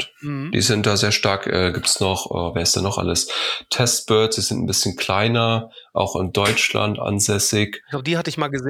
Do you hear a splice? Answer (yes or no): no